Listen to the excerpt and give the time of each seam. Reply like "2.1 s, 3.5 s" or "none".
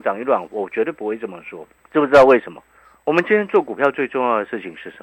1.8 s

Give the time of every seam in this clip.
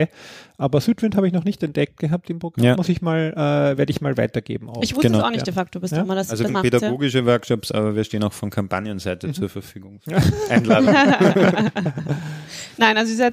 6.5 s

